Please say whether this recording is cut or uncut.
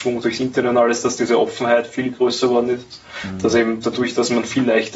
uncut